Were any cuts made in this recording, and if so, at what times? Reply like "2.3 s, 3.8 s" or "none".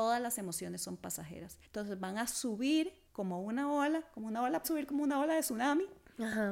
1.6 s, 3.1 s, 4.6 s